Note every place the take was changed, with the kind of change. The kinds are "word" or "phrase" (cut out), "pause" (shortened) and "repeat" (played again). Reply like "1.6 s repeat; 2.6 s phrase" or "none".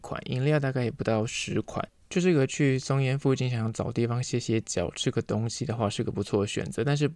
2.0 s pause